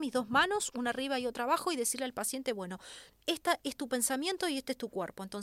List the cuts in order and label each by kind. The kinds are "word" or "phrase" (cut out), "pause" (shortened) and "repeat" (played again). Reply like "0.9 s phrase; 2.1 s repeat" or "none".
none